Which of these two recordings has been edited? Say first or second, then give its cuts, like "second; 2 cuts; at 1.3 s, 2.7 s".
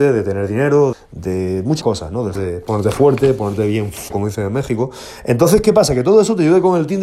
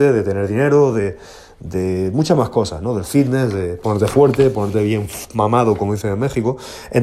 first; 4 cuts; at 0.9 s, 1.8 s, 2.4 s, 4.1 s